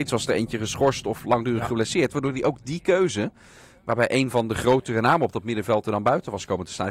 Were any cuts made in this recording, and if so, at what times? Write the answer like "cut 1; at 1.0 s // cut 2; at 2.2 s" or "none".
none